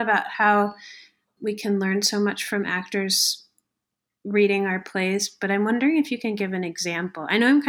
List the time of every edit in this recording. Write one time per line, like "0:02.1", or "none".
0:01.4